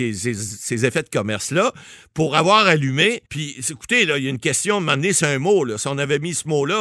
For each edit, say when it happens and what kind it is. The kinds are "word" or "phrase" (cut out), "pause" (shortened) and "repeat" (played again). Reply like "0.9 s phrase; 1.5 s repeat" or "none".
3.2 s pause; 5.2 s word